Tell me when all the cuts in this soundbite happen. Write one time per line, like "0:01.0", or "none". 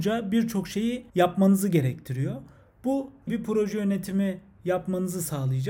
0:01.1
0:03.3